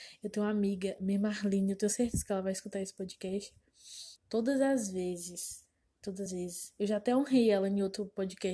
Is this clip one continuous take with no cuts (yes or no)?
no